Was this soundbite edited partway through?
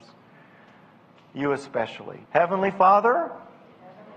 yes; 1 cut; at 2.2 s

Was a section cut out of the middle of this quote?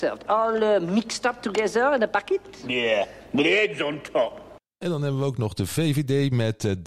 no; 0 cuts

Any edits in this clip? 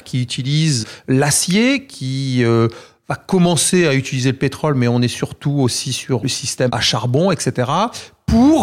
no; 0 cuts

